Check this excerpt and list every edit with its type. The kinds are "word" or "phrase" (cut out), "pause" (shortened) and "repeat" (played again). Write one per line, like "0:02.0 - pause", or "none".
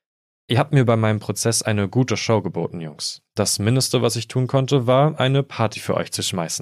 none